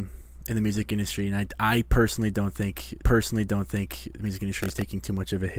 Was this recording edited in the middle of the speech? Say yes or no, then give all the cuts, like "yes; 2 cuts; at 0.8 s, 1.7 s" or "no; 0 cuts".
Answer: yes; 1 cut; at 3.0 s